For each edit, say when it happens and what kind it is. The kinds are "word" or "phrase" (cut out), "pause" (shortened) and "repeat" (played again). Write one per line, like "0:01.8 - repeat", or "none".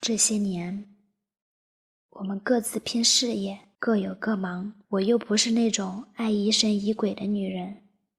0:03.7 - pause
0:04.8 - pause